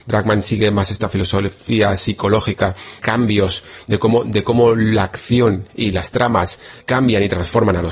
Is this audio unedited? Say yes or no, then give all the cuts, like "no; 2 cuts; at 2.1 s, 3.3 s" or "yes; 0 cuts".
no; 3 cuts; at 3.0 s, 5.7 s, 6.8 s